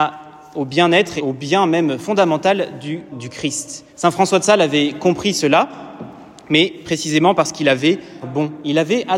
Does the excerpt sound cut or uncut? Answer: cut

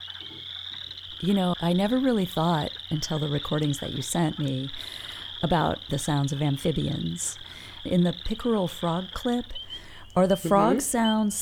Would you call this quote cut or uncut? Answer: cut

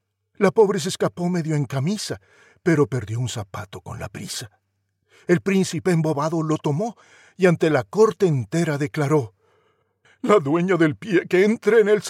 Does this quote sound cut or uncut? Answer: uncut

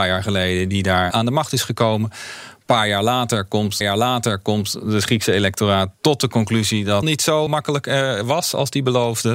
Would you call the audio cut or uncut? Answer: cut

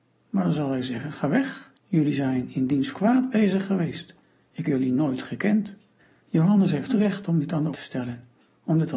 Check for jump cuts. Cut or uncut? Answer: cut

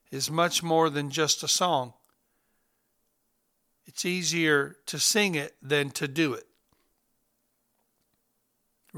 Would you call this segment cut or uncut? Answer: uncut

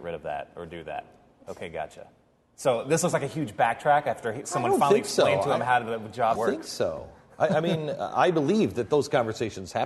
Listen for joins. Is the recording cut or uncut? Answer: cut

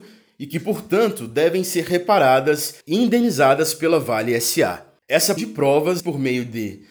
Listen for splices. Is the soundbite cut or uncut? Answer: cut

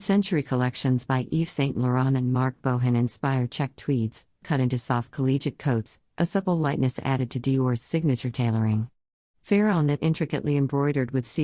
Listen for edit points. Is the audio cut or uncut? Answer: cut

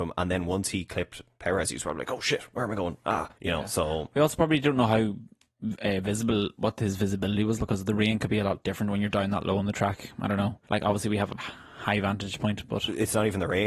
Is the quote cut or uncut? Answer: cut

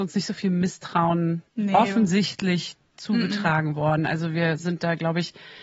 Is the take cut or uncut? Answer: cut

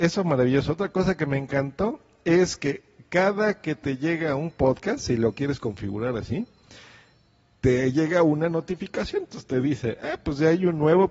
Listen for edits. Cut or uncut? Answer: uncut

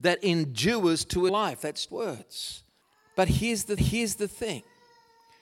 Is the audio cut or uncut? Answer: cut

